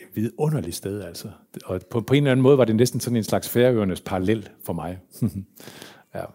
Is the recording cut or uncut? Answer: uncut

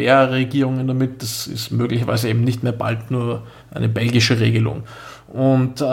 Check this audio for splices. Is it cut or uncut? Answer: cut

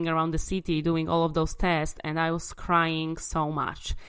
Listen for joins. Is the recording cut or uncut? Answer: uncut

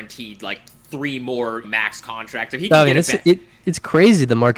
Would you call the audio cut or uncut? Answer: cut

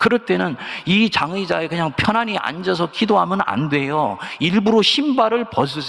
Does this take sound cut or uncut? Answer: uncut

